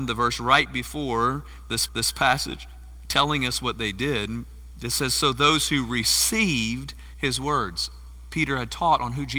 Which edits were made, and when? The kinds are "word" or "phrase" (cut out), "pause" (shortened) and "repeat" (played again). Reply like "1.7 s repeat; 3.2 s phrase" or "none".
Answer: 1.9 s repeat